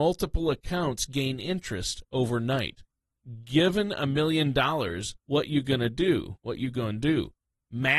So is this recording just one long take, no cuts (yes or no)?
no